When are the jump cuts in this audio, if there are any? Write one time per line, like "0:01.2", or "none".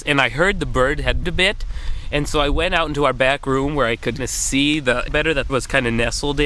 0:01.2
0:04.2
0:05.1
0:05.5